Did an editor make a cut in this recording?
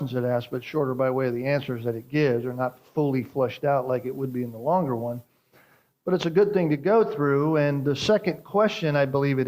no; 0 cuts

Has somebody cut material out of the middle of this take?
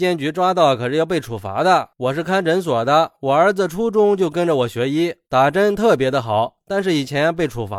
yes; 1 cut; at 1.9 s

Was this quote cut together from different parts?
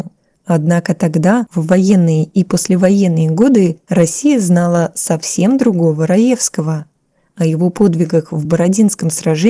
no; 0 cuts

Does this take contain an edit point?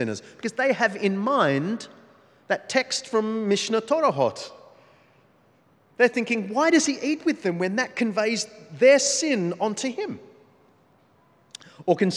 no; 0 cuts

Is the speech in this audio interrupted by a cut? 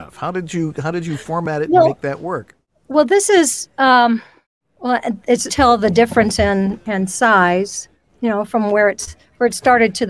yes; 1 cut; at 5.5 s

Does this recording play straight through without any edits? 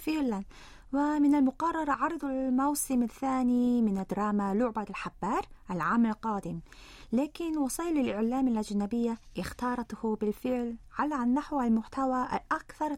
yes; 0 cuts

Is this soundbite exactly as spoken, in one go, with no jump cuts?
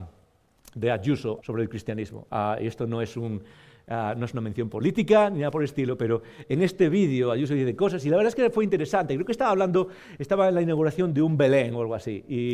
no; 1 cut; at 1.4 s

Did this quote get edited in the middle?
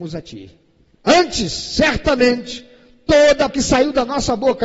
yes; 1 cut; at 3.5 s

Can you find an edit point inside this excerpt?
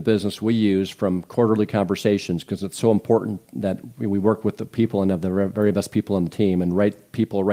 no; 0 cuts

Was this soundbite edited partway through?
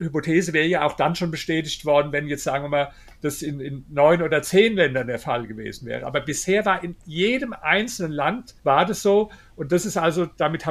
yes; 1 cut; at 8.6 s

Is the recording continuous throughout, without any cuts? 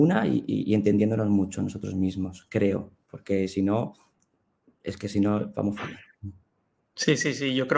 yes; 0 cuts

